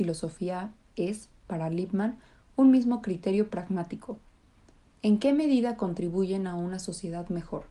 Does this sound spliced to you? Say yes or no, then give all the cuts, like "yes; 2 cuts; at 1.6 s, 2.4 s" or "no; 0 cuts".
no; 0 cuts